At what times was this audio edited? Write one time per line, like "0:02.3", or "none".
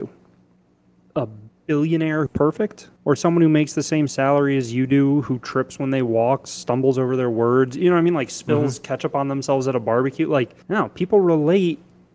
0:02.3
0:03.0
0:10.6